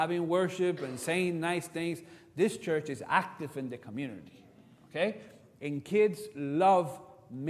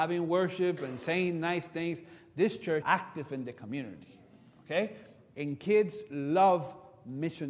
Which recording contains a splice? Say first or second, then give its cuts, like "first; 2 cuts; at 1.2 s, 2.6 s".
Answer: second; 1 cut; at 2.8 s